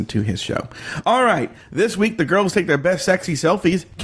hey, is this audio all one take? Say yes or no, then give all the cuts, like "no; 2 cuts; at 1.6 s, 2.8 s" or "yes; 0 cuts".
yes; 0 cuts